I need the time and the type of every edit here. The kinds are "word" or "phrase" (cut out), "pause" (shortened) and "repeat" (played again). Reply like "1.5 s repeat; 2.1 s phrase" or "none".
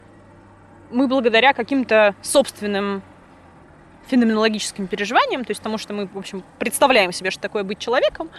none